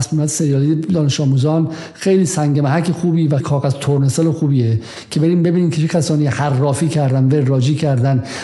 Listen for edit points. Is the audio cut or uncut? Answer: cut